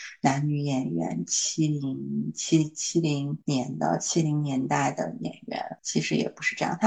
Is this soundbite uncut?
no; 2 cuts; at 3.4 s, 5.8 s

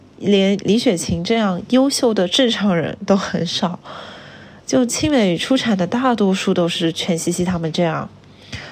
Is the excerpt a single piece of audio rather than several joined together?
yes; 0 cuts

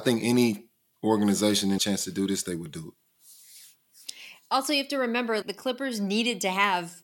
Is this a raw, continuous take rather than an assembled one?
no; 2 cuts; at 1.8 s, 5.4 s

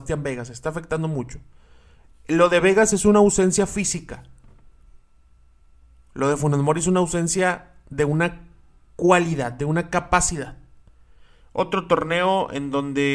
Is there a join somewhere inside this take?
no; 0 cuts

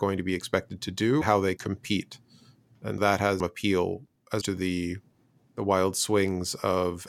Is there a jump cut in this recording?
yes; 5 cuts; at 1.2 s, 1.6 s, 3.0 s, 3.4 s, 4.4 s

